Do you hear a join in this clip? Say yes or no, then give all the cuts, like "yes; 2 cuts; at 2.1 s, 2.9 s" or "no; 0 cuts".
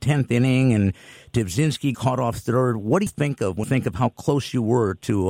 yes; 3 cuts; at 1.9 s, 3.1 s, 3.6 s